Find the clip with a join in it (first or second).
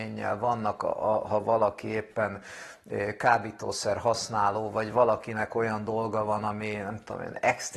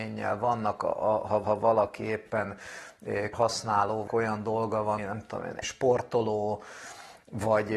second